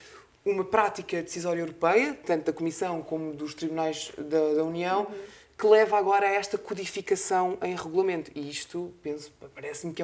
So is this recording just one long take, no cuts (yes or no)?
yes